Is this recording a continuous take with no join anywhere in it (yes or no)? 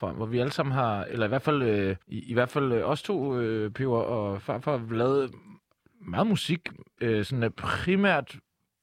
no